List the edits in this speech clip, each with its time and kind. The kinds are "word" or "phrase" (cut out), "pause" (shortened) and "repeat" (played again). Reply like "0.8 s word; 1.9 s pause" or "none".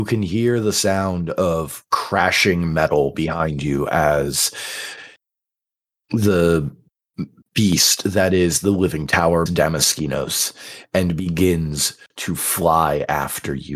9.5 s phrase